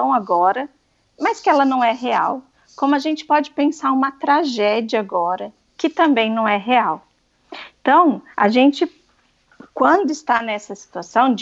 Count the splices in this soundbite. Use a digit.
2